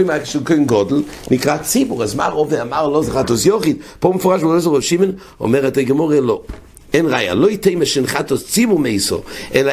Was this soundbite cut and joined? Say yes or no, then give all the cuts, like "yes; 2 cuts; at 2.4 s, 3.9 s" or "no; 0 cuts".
no; 0 cuts